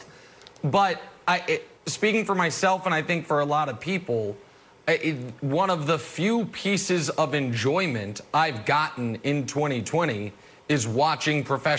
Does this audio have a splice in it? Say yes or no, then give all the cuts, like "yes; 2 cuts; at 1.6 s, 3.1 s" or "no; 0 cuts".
yes; 1 cut; at 1.8 s